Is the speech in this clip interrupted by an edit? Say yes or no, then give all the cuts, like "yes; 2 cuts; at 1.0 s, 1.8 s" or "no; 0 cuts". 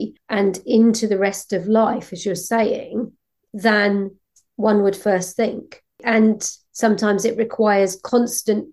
no; 0 cuts